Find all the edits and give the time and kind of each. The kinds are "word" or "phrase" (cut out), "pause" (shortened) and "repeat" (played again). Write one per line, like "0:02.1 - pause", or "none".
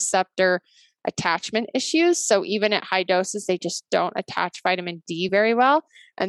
none